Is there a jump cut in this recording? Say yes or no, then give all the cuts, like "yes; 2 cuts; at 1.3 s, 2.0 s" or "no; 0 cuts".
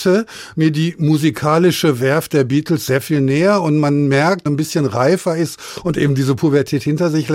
yes; 1 cut; at 4.5 s